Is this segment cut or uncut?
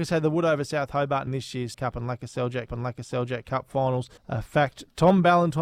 cut